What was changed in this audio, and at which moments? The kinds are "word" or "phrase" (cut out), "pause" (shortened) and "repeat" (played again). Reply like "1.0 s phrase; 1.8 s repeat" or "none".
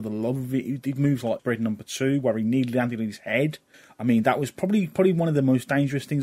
1.4 s word; 3.7 s pause